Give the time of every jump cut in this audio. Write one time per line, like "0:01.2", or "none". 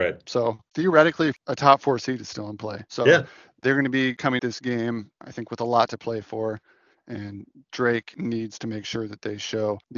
0:04.4